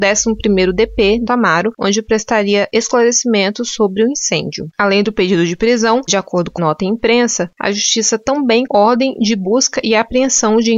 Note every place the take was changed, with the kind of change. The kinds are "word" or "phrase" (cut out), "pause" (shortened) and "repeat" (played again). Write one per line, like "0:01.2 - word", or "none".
0:01.3 - word
0:06.1 - word
0:06.6 - word
0:08.7 - word